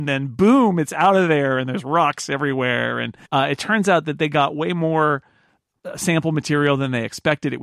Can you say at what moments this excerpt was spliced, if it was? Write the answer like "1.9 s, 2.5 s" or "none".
3.2 s